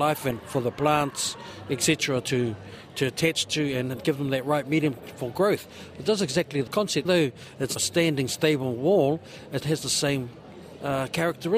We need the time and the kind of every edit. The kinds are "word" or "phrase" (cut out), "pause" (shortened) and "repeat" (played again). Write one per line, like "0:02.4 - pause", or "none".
0:06.7 - word
0:07.0 - word
0:07.8 - word
0:09.6 - word